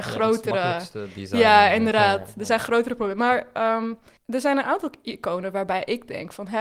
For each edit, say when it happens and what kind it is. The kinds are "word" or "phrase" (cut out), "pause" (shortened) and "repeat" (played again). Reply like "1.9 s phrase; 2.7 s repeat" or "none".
4.2 s pause